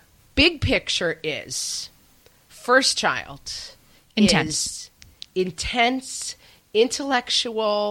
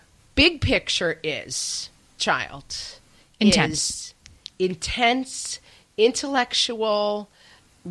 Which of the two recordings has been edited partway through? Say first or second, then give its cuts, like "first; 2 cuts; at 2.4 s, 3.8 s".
second; 1 cut; at 2.2 s